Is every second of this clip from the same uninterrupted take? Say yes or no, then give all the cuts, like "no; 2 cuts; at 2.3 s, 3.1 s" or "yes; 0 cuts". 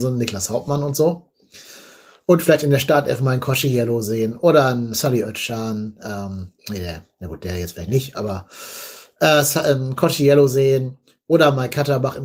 yes; 0 cuts